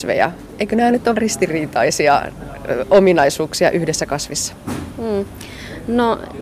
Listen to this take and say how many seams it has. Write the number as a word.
one